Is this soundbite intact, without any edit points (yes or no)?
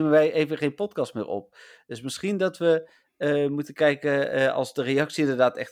yes